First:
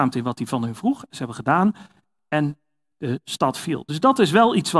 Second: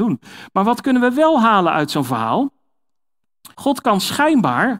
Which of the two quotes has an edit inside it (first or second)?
second